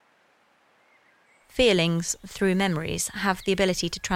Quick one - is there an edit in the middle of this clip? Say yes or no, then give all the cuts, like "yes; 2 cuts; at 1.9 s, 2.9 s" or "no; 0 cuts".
no; 0 cuts